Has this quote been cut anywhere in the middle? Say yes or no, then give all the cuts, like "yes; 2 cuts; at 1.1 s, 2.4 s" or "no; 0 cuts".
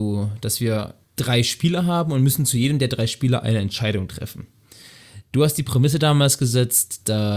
yes; 1 cut; at 1.0 s